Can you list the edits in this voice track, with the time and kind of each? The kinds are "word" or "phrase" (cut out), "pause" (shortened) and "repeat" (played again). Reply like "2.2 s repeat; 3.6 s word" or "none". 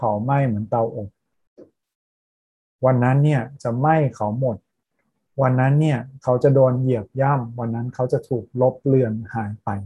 none

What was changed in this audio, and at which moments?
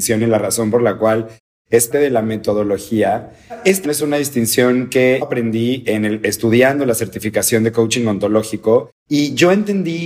1.9 s word; 3.8 s word; 5.2 s word

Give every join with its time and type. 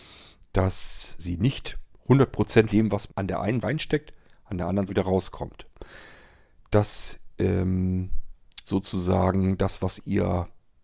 1.2 s word; 2.7 s word; 3.1 s word; 3.6 s word; 4.9 s word; 8.6 s word

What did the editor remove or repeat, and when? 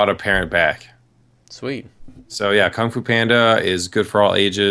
2.2 s pause

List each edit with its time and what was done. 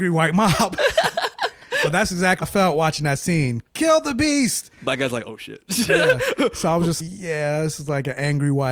2.4 s word; 7.0 s word

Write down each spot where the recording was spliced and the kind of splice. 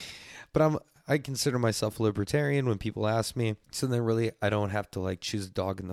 3.6 s pause

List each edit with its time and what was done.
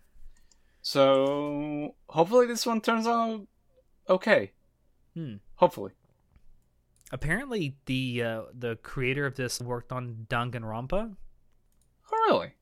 9.6 s word

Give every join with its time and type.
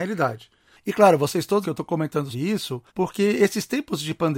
1.6 s phrase; 2.3 s word; 2.9 s pause

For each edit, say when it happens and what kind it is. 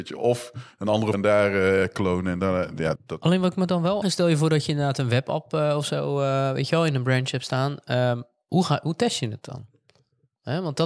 1.1 s word; 3.0 s word; 4.0 s word

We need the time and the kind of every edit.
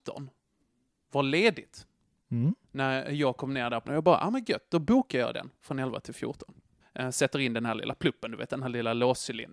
2.6 s pause; 3.8 s word; 6.8 s pause

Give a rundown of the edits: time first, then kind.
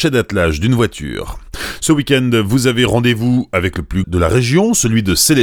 4.0 s phrase

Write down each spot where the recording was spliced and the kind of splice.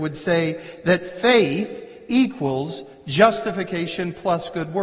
none

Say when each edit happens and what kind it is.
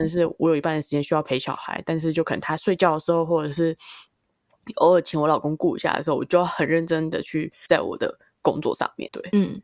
7.7 s word

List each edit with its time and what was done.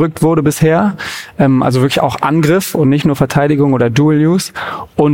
none

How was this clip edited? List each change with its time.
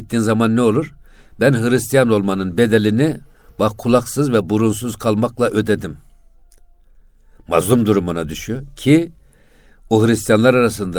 none

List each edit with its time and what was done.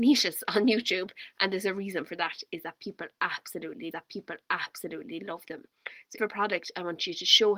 3.9 s repeat; 6.2 s phrase

